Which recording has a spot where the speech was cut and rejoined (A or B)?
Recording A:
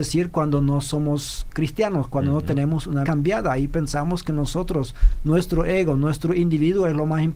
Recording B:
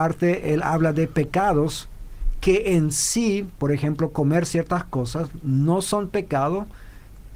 A